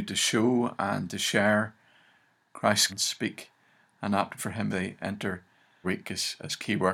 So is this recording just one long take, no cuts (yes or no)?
no